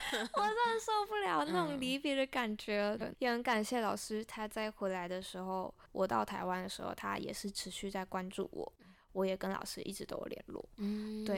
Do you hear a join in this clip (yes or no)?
yes